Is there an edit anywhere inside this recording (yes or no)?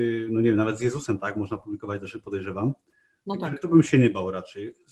no